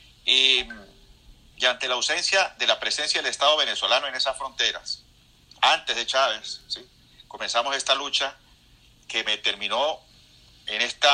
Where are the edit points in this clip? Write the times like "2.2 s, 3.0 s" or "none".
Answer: none